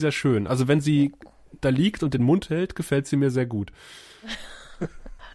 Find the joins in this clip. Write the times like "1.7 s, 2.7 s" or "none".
none